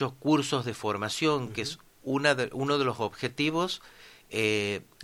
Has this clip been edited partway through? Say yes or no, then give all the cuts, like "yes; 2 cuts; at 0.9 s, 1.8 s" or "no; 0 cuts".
no; 0 cuts